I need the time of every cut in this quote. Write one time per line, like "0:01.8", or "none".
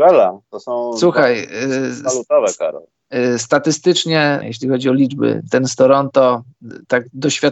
0:04.4